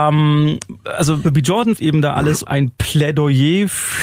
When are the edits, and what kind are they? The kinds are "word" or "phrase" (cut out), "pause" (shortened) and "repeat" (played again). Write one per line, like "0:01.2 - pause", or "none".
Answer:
0:01.2 - word
0:01.8 - word
0:02.4 - phrase